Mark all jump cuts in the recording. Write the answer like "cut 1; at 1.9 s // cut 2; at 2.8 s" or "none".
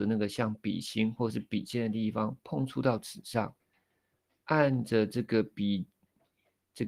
none